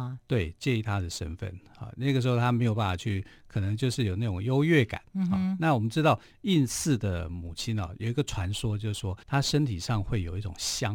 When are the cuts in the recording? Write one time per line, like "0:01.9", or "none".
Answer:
0:09.2

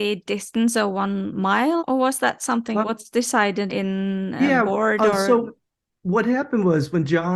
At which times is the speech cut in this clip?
0:01.8
0:02.8
0:03.7

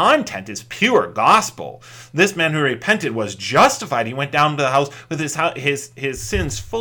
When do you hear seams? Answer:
none

